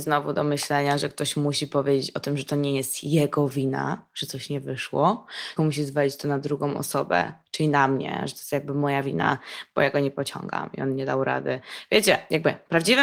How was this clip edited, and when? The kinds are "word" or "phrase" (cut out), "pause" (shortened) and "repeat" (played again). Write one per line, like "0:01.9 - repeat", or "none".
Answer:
0:05.6 - word